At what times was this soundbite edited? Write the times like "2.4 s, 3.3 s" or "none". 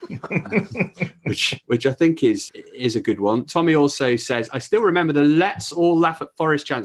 2.5 s